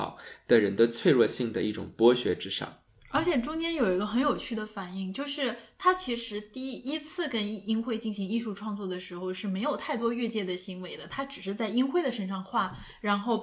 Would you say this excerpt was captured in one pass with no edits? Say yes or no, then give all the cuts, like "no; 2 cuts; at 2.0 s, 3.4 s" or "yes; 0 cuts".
no; 1 cut; at 2.9 s